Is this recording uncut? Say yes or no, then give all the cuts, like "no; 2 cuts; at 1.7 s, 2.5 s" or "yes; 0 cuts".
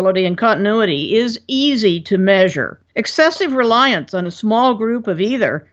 no; 1 cut; at 2.9 s